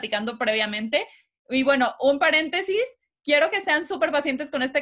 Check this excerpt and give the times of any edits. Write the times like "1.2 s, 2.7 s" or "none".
none